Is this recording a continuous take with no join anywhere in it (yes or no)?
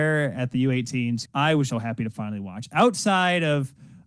no